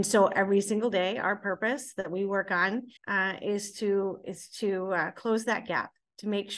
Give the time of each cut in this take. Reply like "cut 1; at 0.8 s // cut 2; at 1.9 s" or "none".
cut 1; at 3.0 s